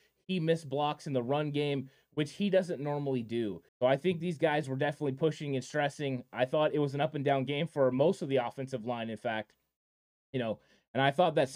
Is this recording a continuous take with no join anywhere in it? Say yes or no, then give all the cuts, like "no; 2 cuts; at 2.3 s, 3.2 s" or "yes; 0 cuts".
no; 1 cut; at 3.7 s